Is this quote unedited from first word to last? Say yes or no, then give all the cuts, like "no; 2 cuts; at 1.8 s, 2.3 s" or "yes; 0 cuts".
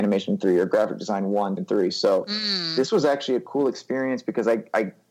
no; 1 cut; at 1.6 s